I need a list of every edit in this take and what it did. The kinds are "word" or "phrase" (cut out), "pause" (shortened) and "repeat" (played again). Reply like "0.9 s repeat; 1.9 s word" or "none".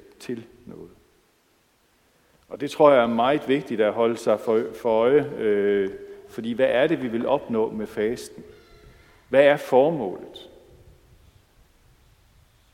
none